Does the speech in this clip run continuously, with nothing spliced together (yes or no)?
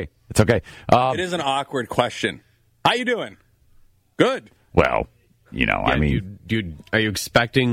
yes